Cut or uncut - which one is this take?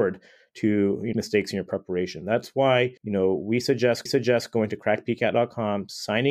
cut